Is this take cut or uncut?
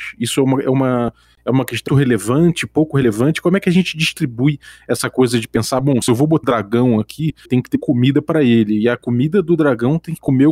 cut